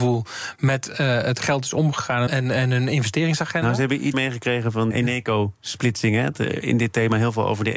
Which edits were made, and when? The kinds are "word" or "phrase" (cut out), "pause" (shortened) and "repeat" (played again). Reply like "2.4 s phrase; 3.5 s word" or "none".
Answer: 2.3 s word; 4.1 s word; 4.9 s word; 6.3 s word